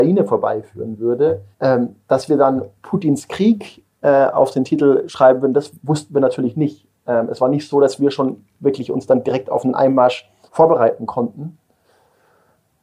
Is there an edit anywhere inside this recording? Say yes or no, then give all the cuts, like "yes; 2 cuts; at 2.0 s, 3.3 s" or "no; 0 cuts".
yes; 3 cuts; at 1.5 s, 3.9 s, 10.5 s